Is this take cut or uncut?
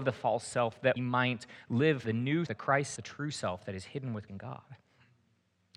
cut